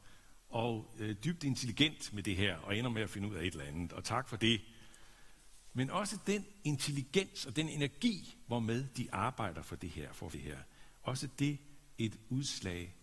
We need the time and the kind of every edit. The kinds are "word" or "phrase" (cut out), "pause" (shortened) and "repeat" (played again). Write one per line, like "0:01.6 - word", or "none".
0:10.3 - phrase
0:11.9 - word